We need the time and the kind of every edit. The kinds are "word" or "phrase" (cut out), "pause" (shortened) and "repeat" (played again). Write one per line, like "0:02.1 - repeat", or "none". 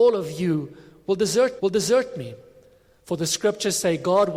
0:01.6 - repeat